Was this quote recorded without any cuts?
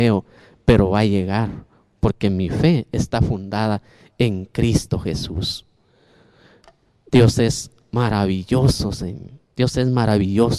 yes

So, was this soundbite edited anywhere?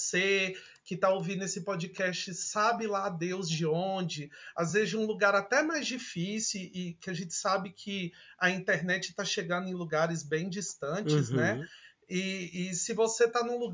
no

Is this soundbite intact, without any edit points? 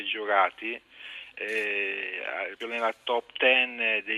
no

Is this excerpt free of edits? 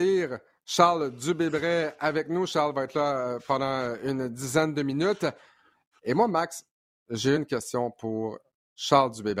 yes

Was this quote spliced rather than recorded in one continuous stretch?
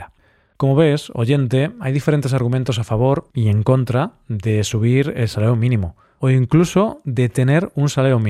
no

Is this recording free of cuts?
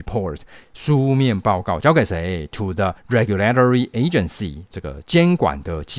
no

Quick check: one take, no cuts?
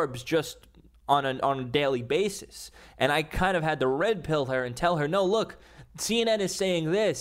yes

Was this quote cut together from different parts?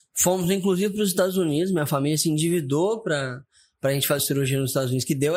yes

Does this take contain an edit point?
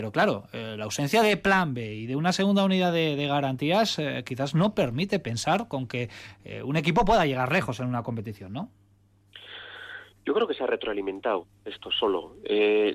no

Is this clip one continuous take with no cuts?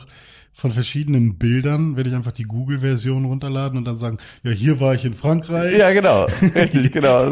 yes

